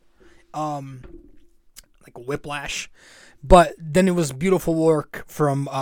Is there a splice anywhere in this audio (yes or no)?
no